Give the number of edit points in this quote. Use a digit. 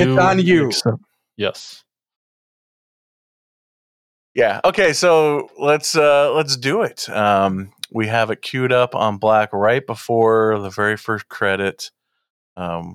0